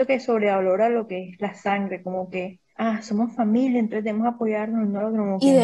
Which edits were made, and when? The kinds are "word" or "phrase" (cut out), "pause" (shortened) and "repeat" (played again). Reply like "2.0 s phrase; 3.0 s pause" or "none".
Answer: 2.7 s pause

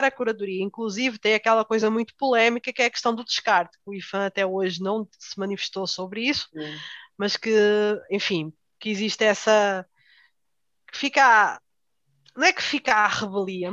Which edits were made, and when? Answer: none

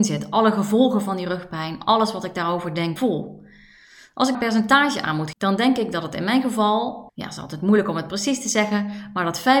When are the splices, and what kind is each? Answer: 3.0 s word; 4.3 s word; 5.3 s word; 7.1 s pause

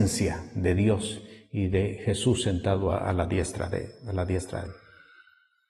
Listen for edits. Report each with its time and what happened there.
4.6 s word

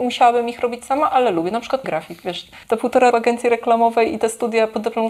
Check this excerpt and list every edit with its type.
1.8 s word; 2.6 s pause; 3.1 s phrase

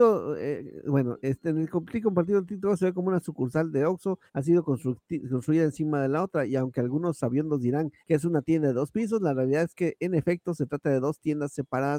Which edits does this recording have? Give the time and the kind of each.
4.3 s pause; 8.0 s pause

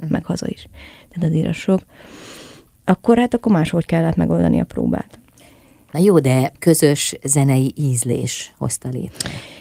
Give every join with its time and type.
6.6 s word

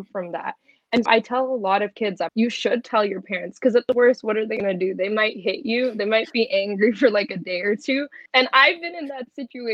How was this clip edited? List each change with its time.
1.1 s word; 2.3 s word; 8.3 s pause

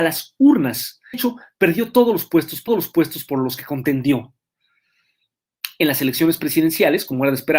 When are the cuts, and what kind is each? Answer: 1.1 s phrase; 2.7 s repeat

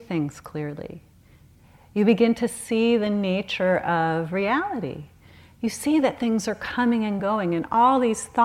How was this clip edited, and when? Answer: none

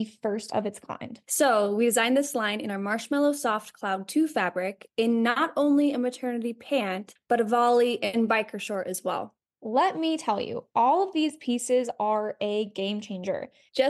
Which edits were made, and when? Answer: 1.2 s pause; 9.5 s pause

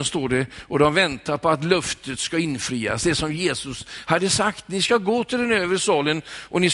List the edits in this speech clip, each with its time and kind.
none

